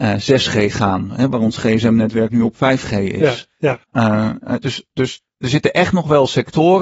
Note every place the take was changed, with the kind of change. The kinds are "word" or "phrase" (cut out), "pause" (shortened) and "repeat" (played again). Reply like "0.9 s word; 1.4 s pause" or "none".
3.8 s pause